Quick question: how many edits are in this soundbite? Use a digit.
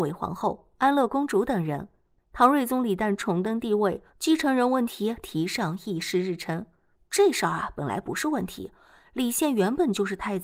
1